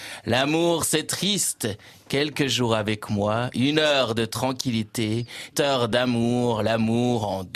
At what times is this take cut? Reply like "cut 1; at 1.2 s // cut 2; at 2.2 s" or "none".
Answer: cut 1; at 5.5 s

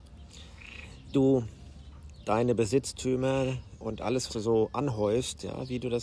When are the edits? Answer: cut 1; at 1.1 s // cut 2; at 3.8 s // cut 3; at 4.3 s

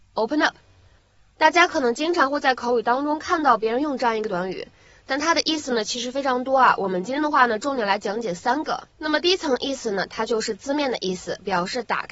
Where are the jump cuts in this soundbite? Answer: cut 1; at 8.9 s

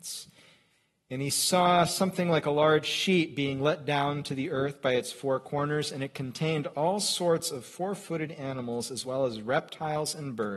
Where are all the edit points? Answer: none

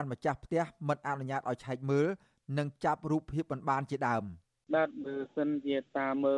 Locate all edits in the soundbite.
none

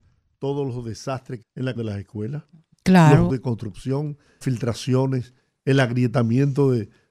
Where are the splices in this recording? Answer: cut 1; at 1.4 s // cut 2; at 1.8 s // cut 3; at 3.3 s // cut 4; at 4.4 s

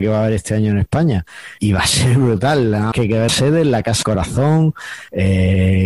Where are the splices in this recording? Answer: cut 1; at 1.6 s // cut 2; at 2.9 s // cut 3; at 3.3 s // cut 4; at 4.0 s

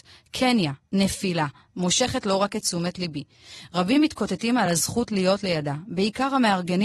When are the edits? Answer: none

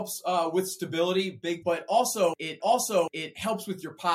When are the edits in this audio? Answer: cut 1; at 1.6 s // cut 2; at 2.6 s

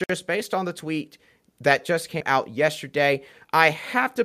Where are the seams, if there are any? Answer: none

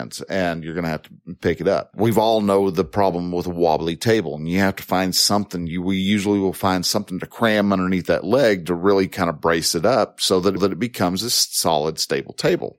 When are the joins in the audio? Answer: cut 1; at 10.6 s

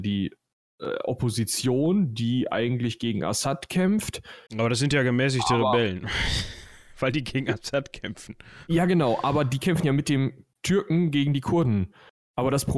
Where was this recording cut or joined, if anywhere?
cut 1; at 4.5 s

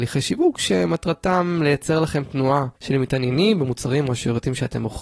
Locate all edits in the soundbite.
none

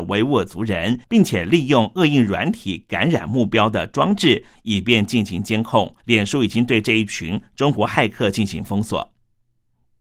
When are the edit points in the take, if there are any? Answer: cut 1; at 1.0 s // cut 2; at 6.0 s

